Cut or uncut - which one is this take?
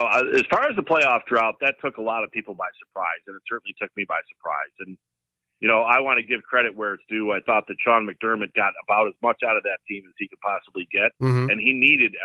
uncut